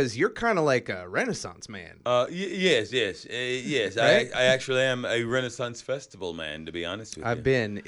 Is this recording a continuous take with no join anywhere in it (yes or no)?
yes